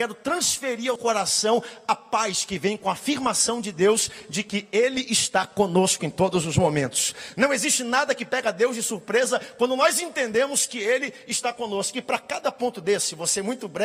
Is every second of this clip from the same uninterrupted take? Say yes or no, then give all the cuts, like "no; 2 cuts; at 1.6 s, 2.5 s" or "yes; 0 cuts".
no; 1 cut; at 1.0 s